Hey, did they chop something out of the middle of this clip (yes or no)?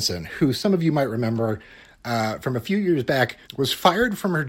yes